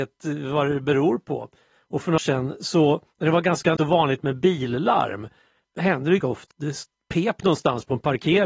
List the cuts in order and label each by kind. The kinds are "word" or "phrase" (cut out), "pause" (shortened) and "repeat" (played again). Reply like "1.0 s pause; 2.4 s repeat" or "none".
2.2 s word; 3.8 s word; 5.6 s word; 6.2 s word; 6.5 s word